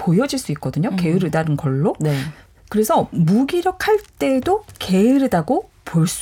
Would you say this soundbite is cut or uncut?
uncut